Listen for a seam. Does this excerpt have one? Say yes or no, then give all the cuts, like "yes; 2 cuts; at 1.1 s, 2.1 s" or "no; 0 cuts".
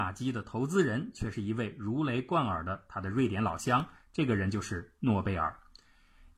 no; 0 cuts